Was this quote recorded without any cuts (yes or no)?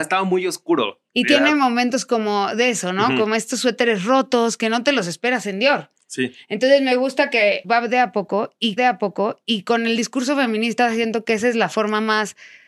no